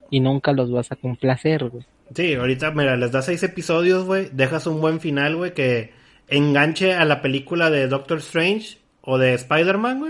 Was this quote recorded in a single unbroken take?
yes; 0 cuts

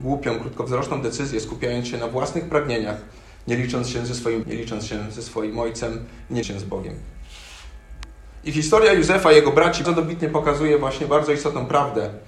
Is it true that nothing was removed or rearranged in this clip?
no; 3 cuts; at 4.4 s, 6.4 s, 9.8 s

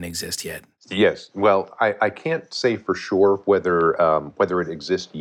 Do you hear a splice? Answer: no; 0 cuts

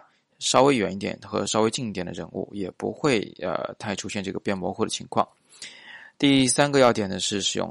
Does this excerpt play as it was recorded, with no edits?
yes; 0 cuts

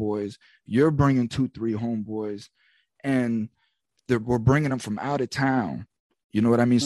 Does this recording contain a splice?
no; 0 cuts

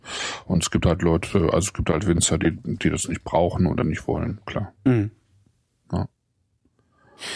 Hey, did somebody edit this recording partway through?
no; 0 cuts

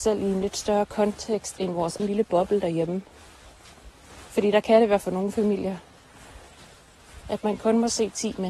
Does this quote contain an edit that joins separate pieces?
yes; 2 cuts; at 2.0 s, 5.0 s

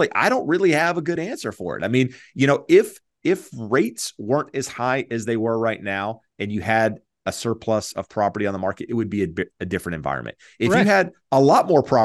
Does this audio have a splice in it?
no; 0 cuts

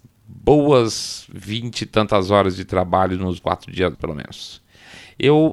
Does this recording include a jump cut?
yes; 2 cuts; at 3.4 s, 3.9 s

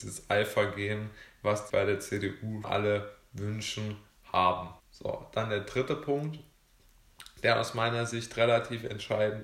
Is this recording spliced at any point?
yes; 3 cuts; at 1.7 s, 2.6 s, 4.8 s

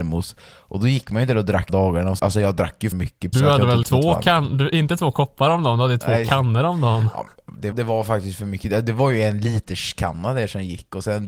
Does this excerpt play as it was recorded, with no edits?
no; 6 cuts; at 1.7 s, 2.2 s, 2.9 s, 3.3 s, 3.8 s, 7.7 s

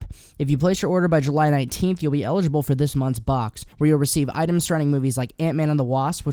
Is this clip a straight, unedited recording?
no; 1 cut; at 3.7 s

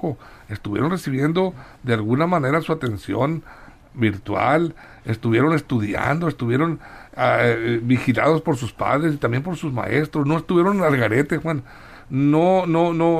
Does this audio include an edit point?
no; 0 cuts

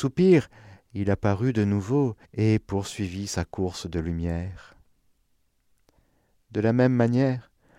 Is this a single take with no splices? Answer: no; 1 cut; at 2.2 s

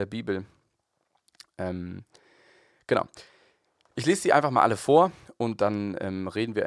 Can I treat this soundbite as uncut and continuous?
yes; 0 cuts

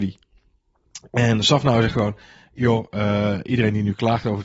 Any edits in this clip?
no; 0 cuts

